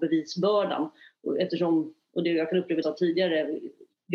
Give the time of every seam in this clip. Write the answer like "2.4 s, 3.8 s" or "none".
2.8 s

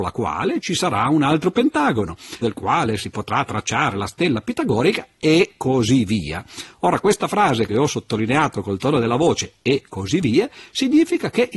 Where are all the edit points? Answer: 2.4 s

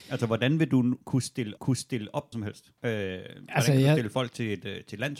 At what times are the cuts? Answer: 1.6 s, 2.3 s, 2.8 s

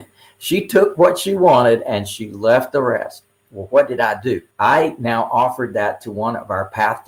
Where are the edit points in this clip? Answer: 4.5 s

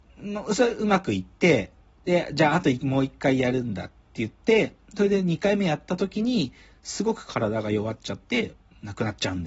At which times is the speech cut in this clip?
none

